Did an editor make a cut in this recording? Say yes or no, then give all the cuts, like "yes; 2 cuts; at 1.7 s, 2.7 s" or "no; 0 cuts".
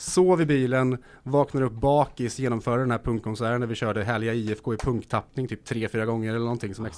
no; 0 cuts